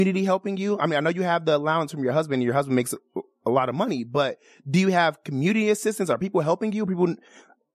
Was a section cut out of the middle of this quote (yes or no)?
no